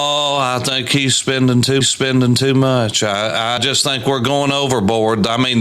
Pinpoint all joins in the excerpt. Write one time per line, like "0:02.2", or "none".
0:01.8
0:03.6